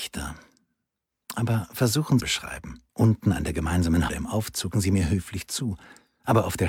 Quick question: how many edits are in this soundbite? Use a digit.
4